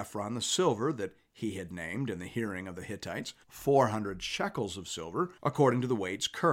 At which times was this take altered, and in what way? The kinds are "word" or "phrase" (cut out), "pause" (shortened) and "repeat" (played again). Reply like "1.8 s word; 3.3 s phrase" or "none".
3.4 s pause; 5.4 s pause